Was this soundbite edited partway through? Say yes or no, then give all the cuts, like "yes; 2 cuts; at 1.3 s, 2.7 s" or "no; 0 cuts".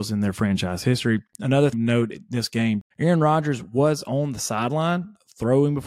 yes; 2 cuts; at 1.7 s, 2.9 s